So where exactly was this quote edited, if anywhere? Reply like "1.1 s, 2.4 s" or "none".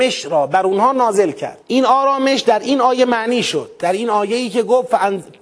1.6 s